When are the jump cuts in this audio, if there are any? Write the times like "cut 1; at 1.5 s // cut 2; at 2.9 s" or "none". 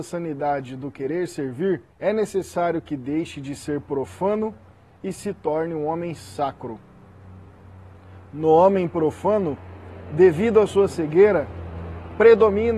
cut 1; at 1.9 s